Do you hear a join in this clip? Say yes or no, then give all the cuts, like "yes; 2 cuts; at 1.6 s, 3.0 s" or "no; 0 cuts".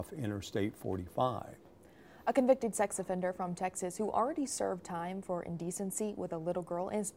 no; 0 cuts